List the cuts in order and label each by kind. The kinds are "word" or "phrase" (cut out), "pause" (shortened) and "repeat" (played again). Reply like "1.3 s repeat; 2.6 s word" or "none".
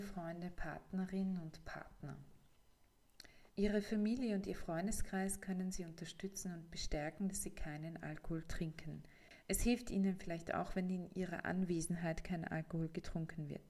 3.5 s pause